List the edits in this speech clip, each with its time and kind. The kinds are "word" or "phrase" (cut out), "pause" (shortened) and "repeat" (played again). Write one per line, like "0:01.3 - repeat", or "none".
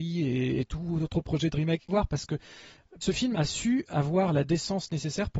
0:01.9 - phrase
0:03.0 - phrase
0:03.3 - word

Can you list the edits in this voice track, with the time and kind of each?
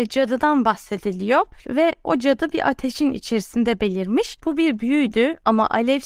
none

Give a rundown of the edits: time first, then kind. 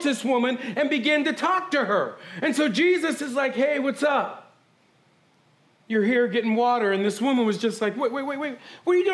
none

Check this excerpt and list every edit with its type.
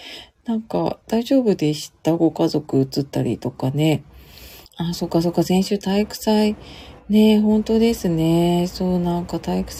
0:01.0 - pause
0:04.7 - pause

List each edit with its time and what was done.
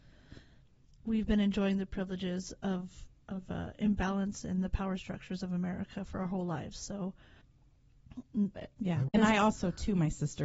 0:08.5 - phrase

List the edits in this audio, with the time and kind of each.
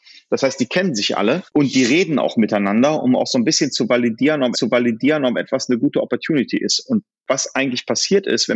0:01.5 - pause
0:04.5 - repeat

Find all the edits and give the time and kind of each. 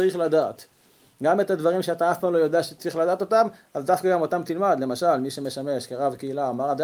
none

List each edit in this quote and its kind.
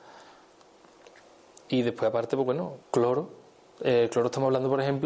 0:02.8 - pause

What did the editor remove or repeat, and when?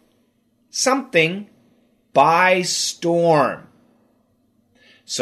none

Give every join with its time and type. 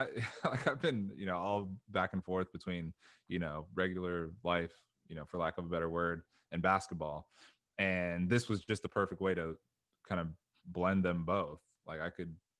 none

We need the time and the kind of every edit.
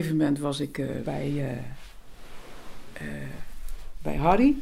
0:01.0 - word

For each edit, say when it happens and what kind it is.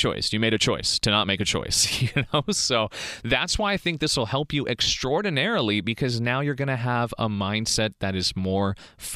none

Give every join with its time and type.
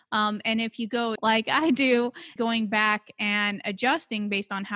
0:01.2 - word
0:02.4 - word

